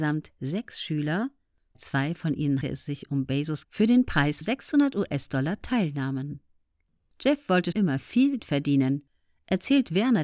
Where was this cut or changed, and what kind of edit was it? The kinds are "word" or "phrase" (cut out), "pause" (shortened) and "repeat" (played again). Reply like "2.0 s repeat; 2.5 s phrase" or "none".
1.7 s word; 2.6 s word; 3.6 s word; 4.4 s word; 7.7 s word; 8.4 s word